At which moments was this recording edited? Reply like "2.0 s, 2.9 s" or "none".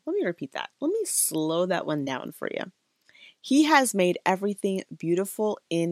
none